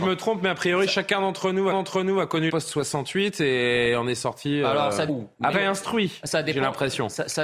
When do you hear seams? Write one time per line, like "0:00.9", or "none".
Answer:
0:01.7
0:02.5
0:05.1
0:05.5